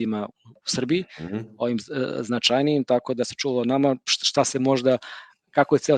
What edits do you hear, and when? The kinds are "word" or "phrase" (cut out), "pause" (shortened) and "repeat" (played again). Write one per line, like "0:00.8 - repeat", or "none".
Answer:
none